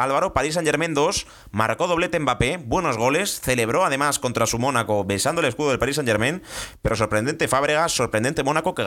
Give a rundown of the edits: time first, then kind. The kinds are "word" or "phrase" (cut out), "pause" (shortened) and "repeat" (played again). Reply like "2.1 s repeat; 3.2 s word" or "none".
none